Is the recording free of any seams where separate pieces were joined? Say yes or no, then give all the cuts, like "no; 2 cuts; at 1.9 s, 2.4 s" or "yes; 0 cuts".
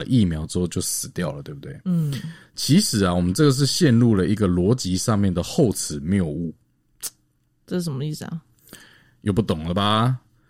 yes; 0 cuts